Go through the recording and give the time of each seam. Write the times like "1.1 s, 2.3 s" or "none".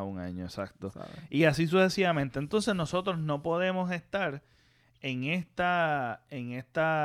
none